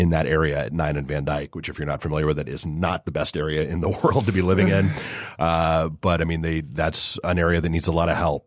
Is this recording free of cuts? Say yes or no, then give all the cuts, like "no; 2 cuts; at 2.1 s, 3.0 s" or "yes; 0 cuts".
yes; 0 cuts